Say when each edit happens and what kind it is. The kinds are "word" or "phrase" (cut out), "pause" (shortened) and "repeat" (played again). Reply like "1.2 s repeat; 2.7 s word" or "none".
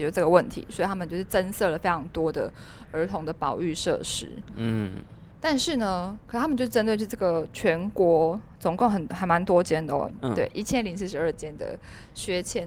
5.3 s pause

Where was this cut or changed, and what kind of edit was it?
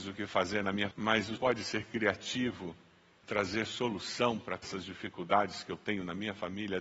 0.9 s word; 1.4 s word; 3.2 s word; 4.6 s word

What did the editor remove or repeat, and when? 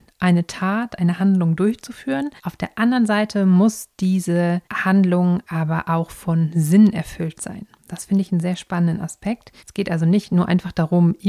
2.4 s pause; 4.6 s pause; 7.8 s pause; 9.6 s pause

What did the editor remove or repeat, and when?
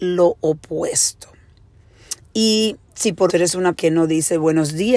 2.8 s pause; 3.3 s phrase; 3.7 s word

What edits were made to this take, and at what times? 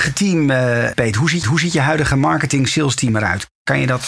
1.4 s repeat

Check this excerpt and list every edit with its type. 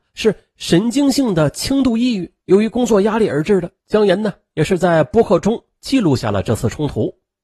2.4 s pause; 3.8 s pause

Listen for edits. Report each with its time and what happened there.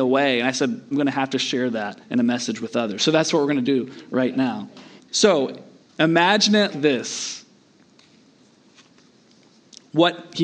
0.9 s phrase; 2.0 s pause; 5.0 s pause; 6.7 s word

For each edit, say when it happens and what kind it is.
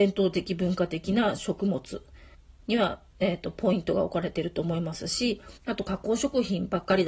2.3 s pause; 5.6 s pause

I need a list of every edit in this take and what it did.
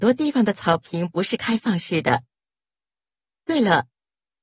none

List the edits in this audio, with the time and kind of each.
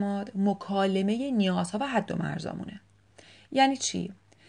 none

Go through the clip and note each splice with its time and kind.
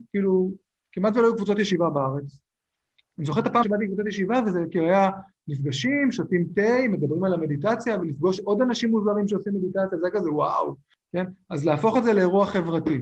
3.6 s word

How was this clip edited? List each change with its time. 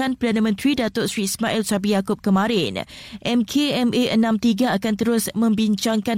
none

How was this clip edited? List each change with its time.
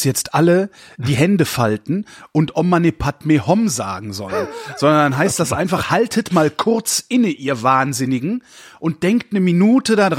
none

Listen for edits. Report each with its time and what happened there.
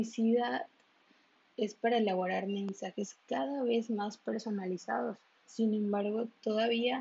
none

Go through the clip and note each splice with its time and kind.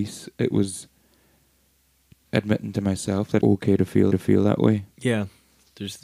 2.3 s word; 3.4 s word; 4.1 s repeat

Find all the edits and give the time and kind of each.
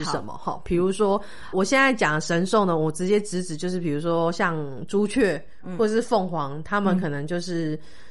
1.5 s word

